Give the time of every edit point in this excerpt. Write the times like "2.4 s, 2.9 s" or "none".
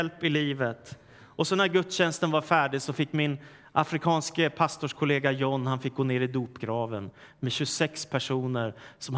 none